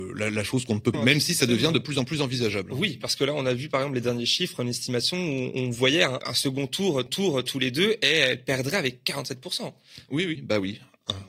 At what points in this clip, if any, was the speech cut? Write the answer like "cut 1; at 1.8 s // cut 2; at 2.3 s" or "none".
cut 1; at 0.9 s // cut 2; at 6.2 s // cut 3; at 7.1 s // cut 4; at 10.4 s

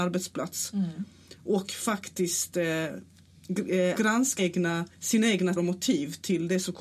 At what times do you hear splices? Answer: cut 1; at 4.0 s // cut 2; at 4.4 s // cut 3; at 4.9 s // cut 4; at 5.6 s

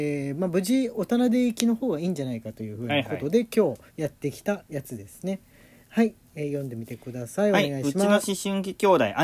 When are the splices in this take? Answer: cut 1; at 3.9 s

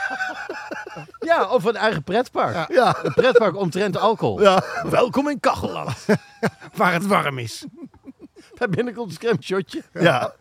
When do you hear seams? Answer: cut 1; at 7.0 s // cut 2; at 9.4 s

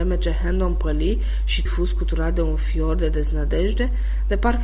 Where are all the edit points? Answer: cut 1; at 1.7 s

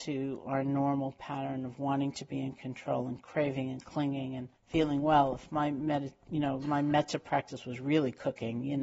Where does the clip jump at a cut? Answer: cut 1; at 4.5 s

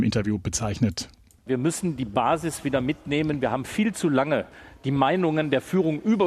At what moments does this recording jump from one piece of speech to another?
none

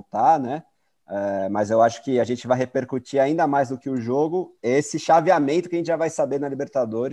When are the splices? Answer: cut 1; at 4.6 s

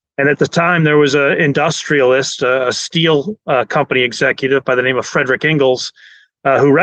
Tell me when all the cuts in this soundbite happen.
none

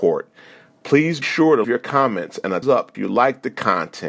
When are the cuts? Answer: cut 1; at 1.2 s // cut 2; at 1.6 s // cut 3; at 2.6 s // cut 4; at 2.9 s

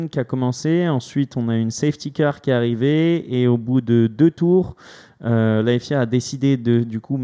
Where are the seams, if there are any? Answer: none

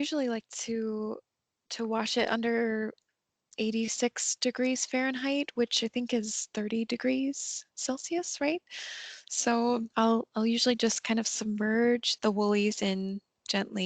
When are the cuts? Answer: cut 1; at 12.2 s

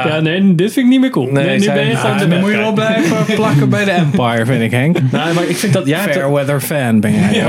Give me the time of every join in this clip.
none

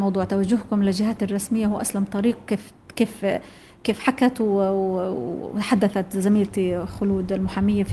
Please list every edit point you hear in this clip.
none

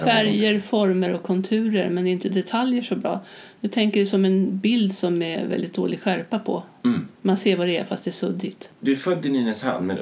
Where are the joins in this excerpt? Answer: cut 1; at 7.1 s

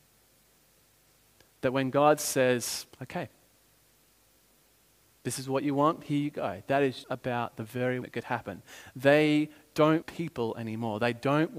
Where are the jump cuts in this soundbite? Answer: cut 1; at 2.9 s // cut 2; at 7.0 s // cut 3; at 8.0 s // cut 4; at 10.0 s

